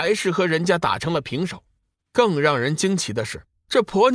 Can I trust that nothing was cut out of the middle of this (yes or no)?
yes